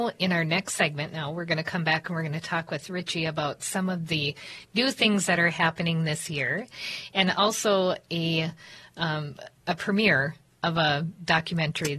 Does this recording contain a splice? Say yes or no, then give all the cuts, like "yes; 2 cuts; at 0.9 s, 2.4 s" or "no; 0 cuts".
no; 0 cuts